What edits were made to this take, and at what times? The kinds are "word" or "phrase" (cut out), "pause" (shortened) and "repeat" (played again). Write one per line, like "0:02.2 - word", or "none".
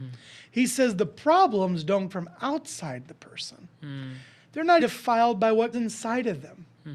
0:02.1 - word
0:04.8 - word
0:05.7 - word